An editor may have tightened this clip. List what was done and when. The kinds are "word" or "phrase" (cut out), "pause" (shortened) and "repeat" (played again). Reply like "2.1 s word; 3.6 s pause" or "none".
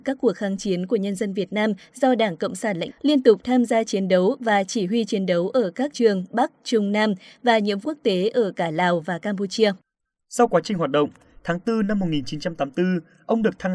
2.9 s word; 5.9 s word; 7.8 s word